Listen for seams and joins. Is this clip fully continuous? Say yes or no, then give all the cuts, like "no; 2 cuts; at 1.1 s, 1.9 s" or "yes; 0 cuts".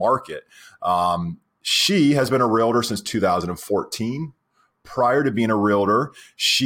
yes; 0 cuts